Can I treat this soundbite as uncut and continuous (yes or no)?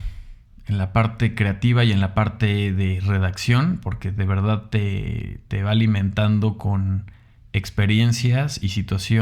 yes